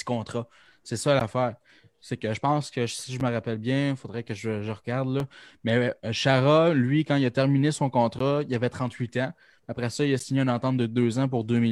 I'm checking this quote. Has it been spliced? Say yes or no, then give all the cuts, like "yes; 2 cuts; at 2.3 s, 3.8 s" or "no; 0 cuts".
no; 0 cuts